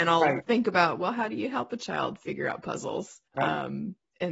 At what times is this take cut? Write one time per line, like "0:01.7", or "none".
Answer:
0:03.3